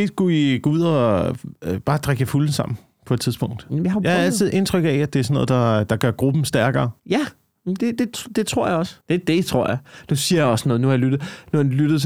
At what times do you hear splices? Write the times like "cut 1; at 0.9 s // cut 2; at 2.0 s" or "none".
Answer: cut 1; at 7.0 s // cut 2; at 9.0 s